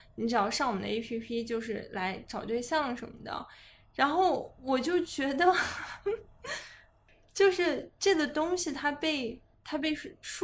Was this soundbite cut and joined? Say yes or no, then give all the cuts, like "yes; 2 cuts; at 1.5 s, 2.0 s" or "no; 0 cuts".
no; 0 cuts